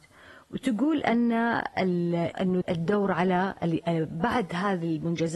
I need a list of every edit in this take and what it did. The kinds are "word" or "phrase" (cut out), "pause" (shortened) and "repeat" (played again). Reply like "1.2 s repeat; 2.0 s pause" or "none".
2.3 s word; 2.6 s word